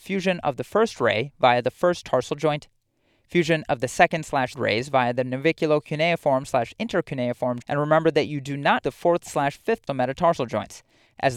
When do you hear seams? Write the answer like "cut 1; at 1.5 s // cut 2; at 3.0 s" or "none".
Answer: cut 1; at 2.3 s // cut 2; at 4.5 s // cut 3; at 7.6 s // cut 4; at 8.8 s // cut 5; at 9.9 s